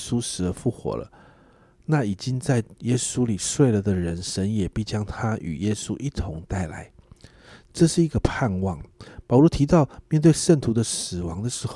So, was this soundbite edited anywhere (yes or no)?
no